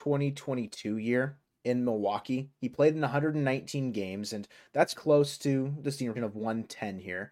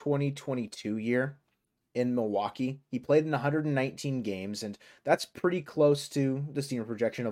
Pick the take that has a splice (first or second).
first